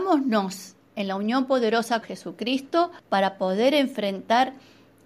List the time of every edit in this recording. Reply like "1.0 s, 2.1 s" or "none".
2.0 s, 3.0 s